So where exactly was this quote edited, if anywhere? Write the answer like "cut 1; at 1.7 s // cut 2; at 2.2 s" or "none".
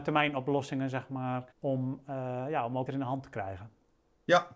cut 1; at 1.5 s // cut 2; at 2.9 s